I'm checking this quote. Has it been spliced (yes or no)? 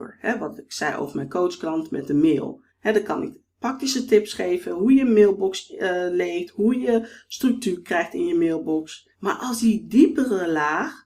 yes